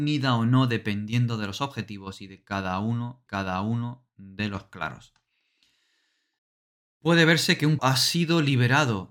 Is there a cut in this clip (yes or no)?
yes